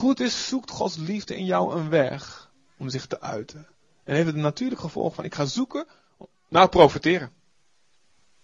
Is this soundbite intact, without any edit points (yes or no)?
yes